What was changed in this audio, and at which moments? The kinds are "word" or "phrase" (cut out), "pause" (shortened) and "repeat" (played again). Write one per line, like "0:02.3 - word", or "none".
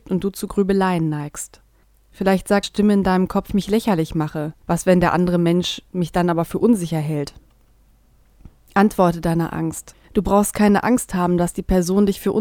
0:01.8 - pause
0:02.6 - word
0:03.5 - phrase
0:04.6 - pause
0:05.9 - pause
0:10.0 - pause